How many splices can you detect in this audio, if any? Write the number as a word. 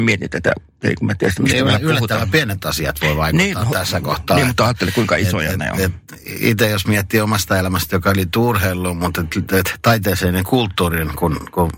zero